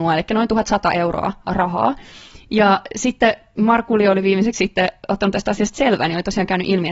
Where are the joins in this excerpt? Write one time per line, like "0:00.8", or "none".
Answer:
none